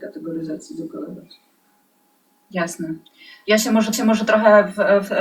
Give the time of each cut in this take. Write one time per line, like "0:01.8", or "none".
0:03.9